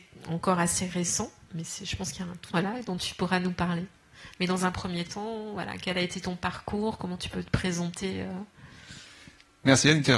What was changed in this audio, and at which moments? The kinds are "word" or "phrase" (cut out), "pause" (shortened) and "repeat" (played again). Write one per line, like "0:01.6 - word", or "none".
0:02.5 - phrase